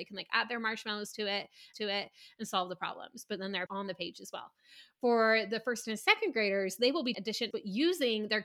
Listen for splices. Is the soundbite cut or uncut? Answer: cut